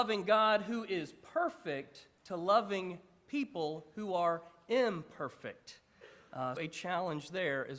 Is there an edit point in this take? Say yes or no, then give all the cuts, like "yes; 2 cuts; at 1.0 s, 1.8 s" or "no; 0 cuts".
yes; 2 cuts; at 2.2 s, 6.6 s